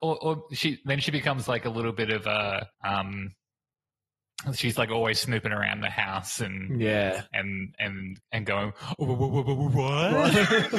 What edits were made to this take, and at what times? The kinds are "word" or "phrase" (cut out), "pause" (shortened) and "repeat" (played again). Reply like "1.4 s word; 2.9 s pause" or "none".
2.7 s pause; 8.3 s pause

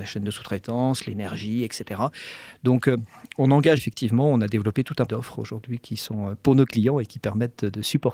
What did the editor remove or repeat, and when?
3.8 s word; 5.1 s word

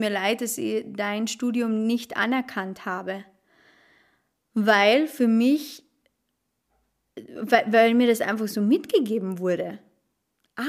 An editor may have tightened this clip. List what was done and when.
none

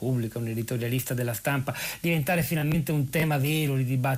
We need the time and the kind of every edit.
none

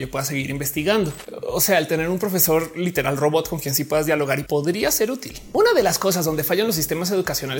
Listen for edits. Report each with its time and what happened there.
4.5 s word

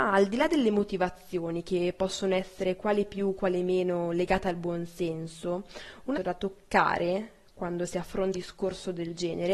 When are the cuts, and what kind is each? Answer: 6.1 s phrase; 8.3 s word

